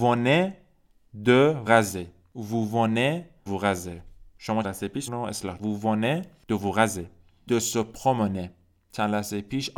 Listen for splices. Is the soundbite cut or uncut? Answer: cut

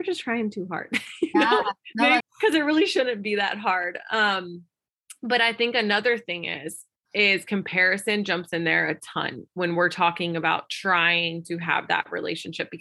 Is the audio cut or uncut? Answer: cut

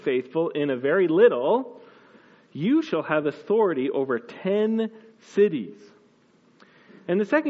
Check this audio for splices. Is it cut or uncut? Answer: uncut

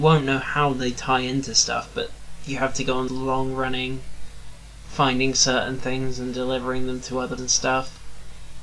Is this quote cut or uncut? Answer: cut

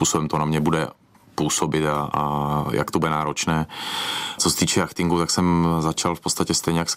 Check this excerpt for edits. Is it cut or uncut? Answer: uncut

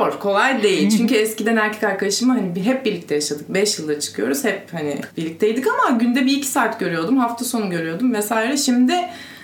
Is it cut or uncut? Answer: cut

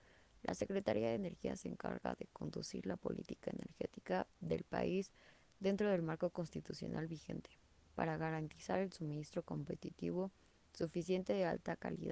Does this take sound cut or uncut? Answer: uncut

